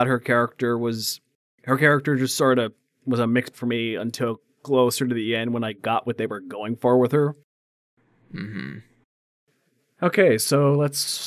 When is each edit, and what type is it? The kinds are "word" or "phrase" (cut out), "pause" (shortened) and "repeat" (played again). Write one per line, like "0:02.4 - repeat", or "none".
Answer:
0:03.5 - word